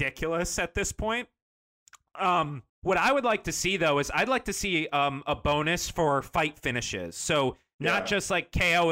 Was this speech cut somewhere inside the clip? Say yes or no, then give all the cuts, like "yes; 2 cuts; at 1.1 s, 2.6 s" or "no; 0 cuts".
yes; 1 cut; at 2.7 s